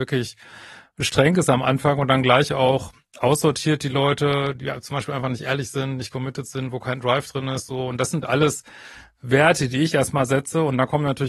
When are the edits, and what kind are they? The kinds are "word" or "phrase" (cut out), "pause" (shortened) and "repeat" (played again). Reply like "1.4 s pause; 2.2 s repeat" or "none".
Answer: none